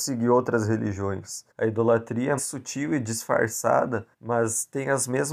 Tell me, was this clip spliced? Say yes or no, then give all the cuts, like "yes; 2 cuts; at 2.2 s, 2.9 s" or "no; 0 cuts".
yes; 3 cuts; at 1.5 s, 2.4 s, 4.1 s